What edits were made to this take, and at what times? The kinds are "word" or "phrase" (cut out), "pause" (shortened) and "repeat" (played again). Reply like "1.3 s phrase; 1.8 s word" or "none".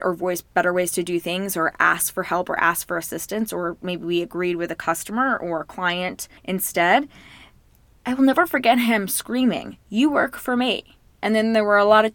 6.4 s pause; 9.8 s pause